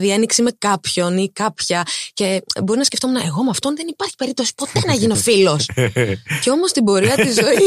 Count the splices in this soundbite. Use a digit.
0